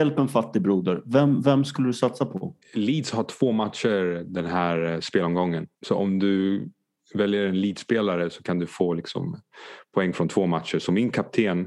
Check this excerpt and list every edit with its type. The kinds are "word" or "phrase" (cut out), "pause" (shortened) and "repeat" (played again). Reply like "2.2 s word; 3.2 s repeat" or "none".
2.6 s pause; 5.7 s pause